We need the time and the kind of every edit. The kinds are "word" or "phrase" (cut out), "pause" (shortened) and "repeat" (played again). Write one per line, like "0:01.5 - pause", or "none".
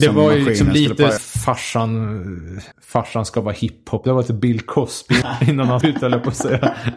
0:01.2 - word
0:02.7 - pause
0:05.2 - word
0:05.8 - word